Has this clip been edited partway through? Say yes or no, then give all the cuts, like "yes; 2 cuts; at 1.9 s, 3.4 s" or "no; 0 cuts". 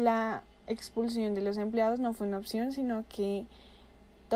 no; 0 cuts